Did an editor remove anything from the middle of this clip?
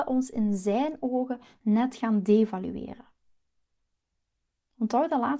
no; 0 cuts

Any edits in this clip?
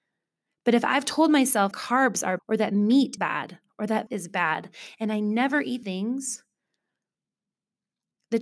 yes; 5 cuts; at 1.7 s, 2.4 s, 3.2 s, 4.1 s, 5.8 s

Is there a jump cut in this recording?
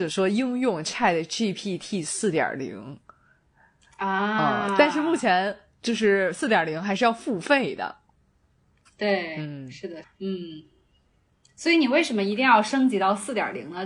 yes; 1 cut; at 10.0 s

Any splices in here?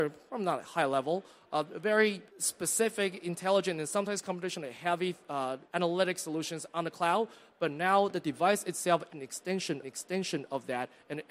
yes; 4 cuts; at 2.3 s, 5.6 s, 9.1 s, 9.8 s

